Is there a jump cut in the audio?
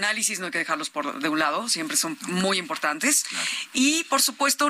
no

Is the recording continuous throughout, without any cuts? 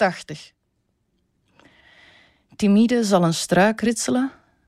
yes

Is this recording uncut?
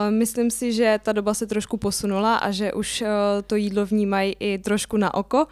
yes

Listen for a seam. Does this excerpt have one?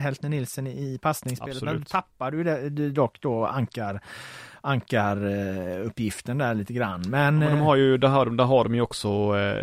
no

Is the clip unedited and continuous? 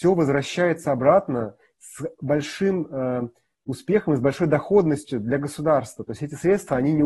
yes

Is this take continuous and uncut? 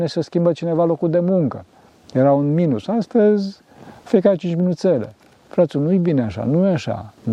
yes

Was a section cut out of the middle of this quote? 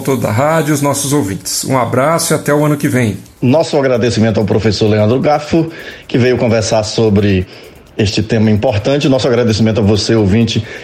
no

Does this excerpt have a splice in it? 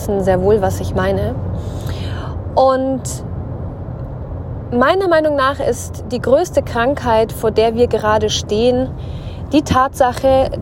no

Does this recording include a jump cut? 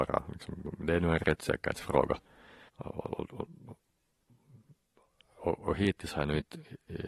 yes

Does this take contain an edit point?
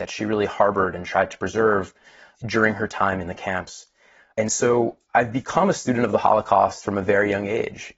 no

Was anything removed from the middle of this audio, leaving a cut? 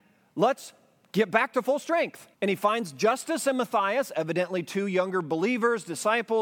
yes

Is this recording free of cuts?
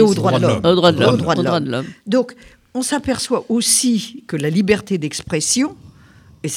yes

